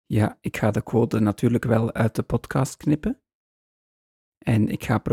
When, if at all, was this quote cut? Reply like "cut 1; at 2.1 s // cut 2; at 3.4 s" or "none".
none